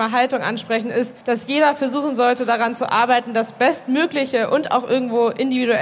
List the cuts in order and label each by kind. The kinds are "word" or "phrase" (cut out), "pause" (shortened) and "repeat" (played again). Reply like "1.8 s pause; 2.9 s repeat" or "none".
1.2 s pause